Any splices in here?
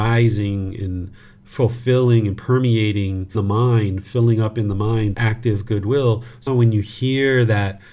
yes; 3 cuts; at 3.3 s, 5.1 s, 6.5 s

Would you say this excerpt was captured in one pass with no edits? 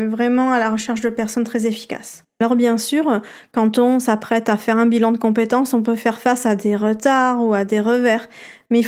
yes; 0 cuts

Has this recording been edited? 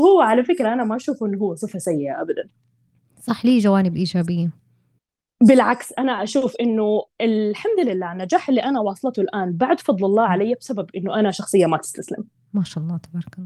no; 0 cuts

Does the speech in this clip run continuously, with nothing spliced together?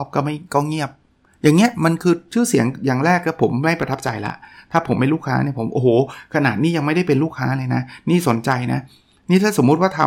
yes; 0 cuts

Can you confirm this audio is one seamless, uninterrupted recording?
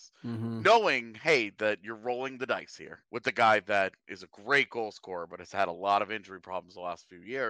no; 1 cut; at 3.0 s

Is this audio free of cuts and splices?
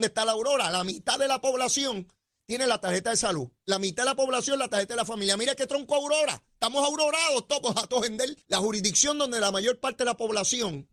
no; 1 cut; at 8.4 s

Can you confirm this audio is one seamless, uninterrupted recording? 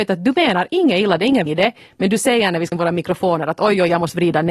no; 2 cuts; at 1.5 s, 2.7 s

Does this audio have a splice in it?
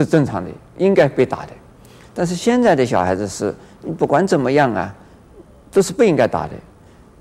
no; 0 cuts

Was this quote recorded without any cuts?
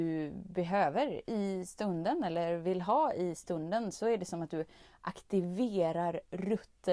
yes; 0 cuts

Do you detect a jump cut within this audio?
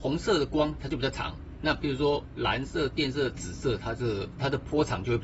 no; 0 cuts

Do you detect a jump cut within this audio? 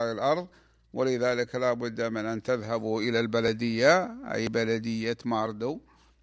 no; 0 cuts

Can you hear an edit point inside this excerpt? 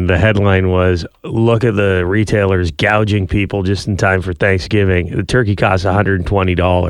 no; 0 cuts

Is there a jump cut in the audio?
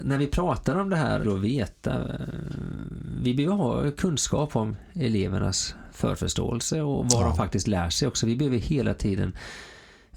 yes; 1 cut; at 1.2 s

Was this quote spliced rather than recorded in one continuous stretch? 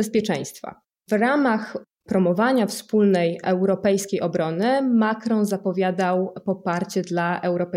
no; 0 cuts

